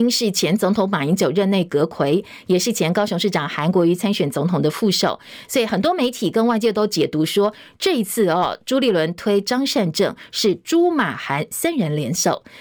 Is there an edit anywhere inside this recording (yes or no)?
no